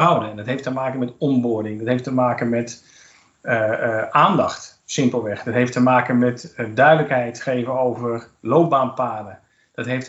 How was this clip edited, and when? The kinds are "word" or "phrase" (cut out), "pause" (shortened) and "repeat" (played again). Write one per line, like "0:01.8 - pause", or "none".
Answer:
none